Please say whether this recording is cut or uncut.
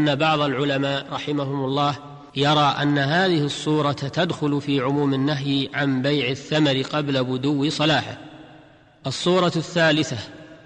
cut